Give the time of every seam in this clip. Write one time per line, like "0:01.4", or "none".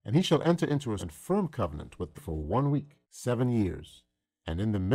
0:01.0
0:02.1
0:03.0